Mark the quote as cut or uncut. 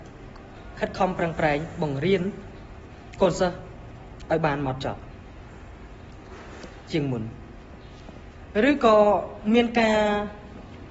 uncut